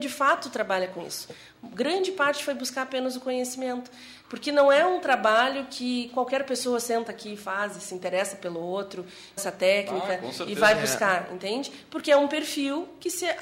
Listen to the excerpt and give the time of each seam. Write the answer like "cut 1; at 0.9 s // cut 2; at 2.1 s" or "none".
cut 1; at 9.4 s

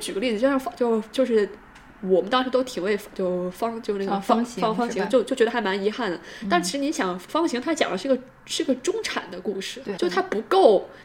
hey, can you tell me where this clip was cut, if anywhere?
cut 1; at 7.3 s // cut 2; at 10.0 s

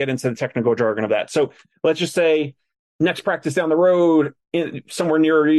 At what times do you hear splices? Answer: none

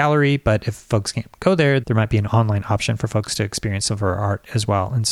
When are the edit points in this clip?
cut 1; at 1.8 s

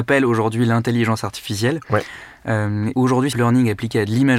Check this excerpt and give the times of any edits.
cut 1; at 2.9 s // cut 2; at 3.3 s

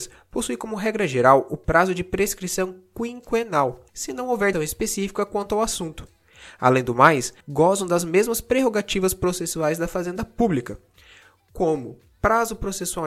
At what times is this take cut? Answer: cut 1; at 3.9 s // cut 2; at 4.5 s // cut 3; at 7.4 s

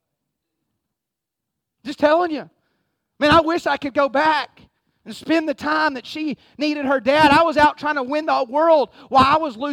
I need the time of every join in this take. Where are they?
none

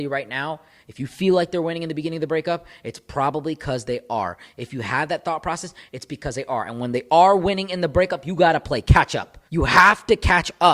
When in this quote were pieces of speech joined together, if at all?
cut 1; at 9.5 s

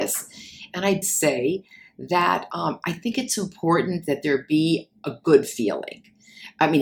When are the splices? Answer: cut 1; at 1.0 s

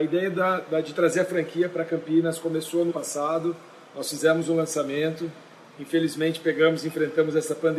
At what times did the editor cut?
cut 1; at 2.9 s

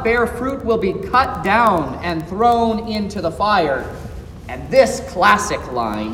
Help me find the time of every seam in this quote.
none

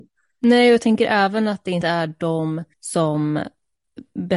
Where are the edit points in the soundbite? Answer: cut 1; at 2.7 s

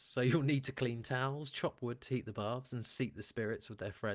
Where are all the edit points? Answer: none

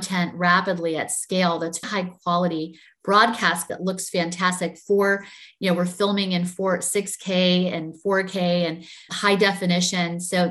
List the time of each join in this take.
cut 1; at 1.8 s // cut 2; at 3.7 s // cut 3; at 9.1 s

